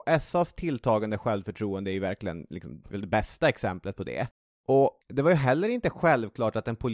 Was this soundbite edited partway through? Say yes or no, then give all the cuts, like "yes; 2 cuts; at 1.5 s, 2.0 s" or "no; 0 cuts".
yes; 2 cuts; at 2.9 s, 5.0 s